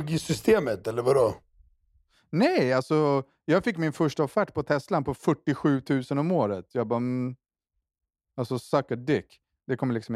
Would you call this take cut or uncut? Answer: uncut